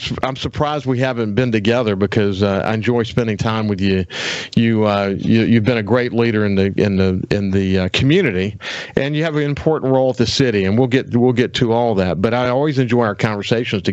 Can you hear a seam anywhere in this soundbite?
no; 0 cuts

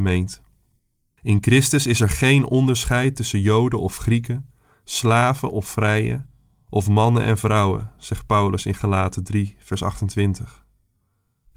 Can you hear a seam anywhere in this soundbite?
no; 0 cuts

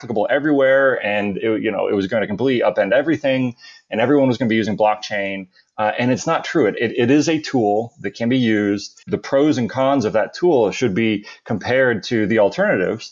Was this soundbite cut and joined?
yes; 1 cut; at 9.0 s

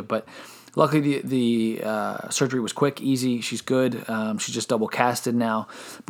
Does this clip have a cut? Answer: no; 0 cuts

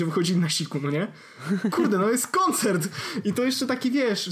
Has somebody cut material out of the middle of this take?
no; 0 cuts

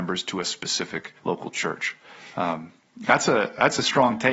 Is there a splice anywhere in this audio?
yes; 1 cut; at 1.2 s

